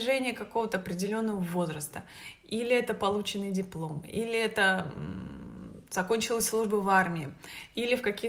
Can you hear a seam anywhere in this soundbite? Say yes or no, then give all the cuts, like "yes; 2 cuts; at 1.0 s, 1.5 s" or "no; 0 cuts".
no; 0 cuts